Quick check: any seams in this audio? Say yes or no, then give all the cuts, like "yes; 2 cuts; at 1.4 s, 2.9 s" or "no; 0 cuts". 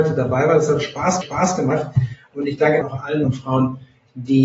yes; 3 cuts; at 1.2 s, 2.8 s, 3.2 s